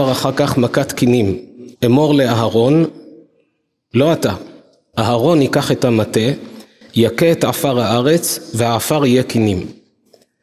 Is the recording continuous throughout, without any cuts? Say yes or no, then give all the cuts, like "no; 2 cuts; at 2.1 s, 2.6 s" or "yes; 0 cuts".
no; 1 cut; at 1.8 s